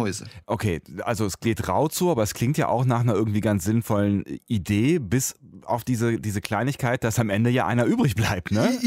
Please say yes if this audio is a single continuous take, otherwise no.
yes